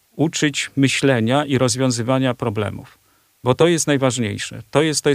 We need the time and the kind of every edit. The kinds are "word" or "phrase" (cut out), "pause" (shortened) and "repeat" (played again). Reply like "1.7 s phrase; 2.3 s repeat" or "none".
none

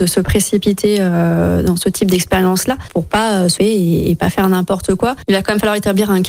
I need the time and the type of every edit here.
2.9 s word; 3.6 s word

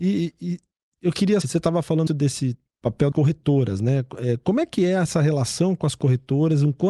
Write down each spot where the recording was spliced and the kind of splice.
1.4 s phrase; 2.1 s word; 3.1 s word

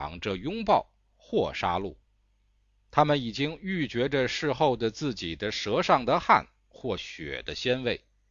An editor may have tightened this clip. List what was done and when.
none

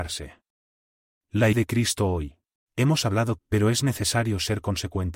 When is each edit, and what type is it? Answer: 1.5 s word; 2.6 s pause; 3.4 s word

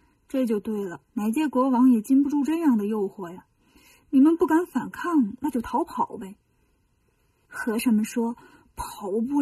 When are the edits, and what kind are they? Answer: 1.1 s pause

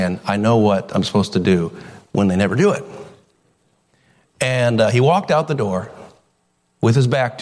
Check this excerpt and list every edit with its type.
none

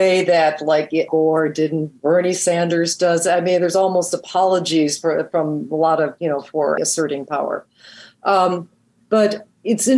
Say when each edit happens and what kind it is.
1.1 s word; 6.2 s word; 6.8 s word

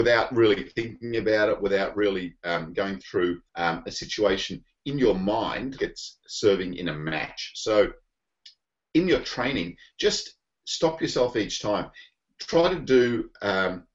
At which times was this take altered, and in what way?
3.5 s pause; 5.8 s word

